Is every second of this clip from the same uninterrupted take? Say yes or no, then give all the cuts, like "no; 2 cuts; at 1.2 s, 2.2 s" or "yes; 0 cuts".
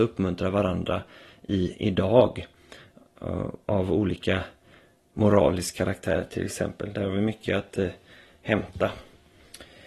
yes; 0 cuts